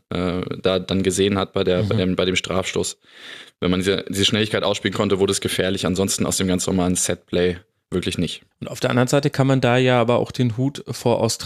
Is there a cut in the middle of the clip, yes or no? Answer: yes